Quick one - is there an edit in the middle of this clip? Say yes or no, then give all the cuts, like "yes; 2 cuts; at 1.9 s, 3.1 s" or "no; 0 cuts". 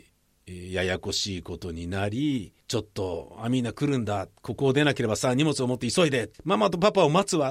yes; 2 cuts; at 2.6 s, 6.3 s